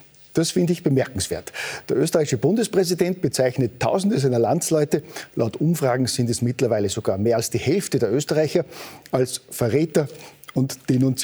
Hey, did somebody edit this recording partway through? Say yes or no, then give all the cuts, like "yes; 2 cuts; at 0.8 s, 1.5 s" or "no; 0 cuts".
no; 0 cuts